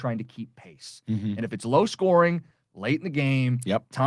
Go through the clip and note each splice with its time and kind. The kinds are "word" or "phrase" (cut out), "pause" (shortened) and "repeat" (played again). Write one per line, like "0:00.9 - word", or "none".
none